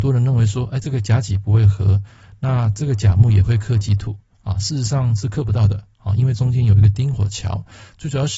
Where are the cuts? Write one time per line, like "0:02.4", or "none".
none

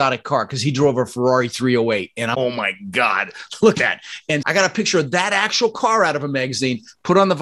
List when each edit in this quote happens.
0:02.3
0:03.7
0:04.4

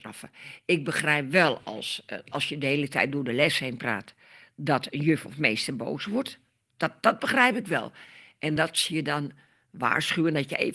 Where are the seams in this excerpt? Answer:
none

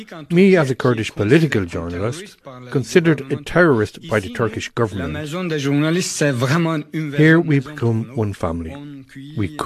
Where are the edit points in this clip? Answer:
none

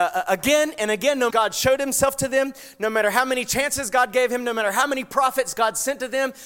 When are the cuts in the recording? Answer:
0:01.3

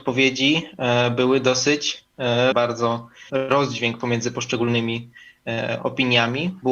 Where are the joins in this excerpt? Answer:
0:02.5
0:03.3

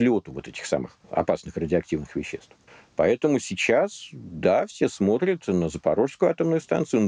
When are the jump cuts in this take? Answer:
0:01.0
0:02.7

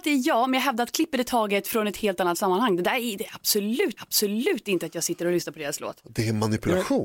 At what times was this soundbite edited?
0:04.0

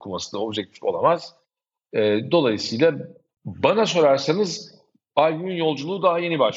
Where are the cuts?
none

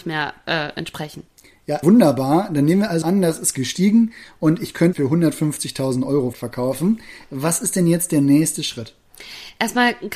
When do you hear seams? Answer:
0:01.8
0:03.0
0:04.9
0:06.3

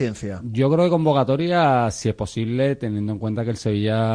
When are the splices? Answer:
none

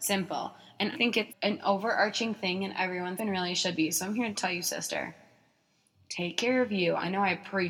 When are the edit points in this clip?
0:00.9
0:01.3
0:03.2

